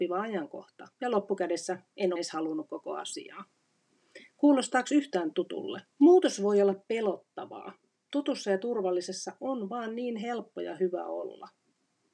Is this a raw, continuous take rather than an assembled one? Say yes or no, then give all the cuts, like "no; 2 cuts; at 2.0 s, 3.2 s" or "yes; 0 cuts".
no; 3 cuts; at 0.9 s, 2.2 s, 5.9 s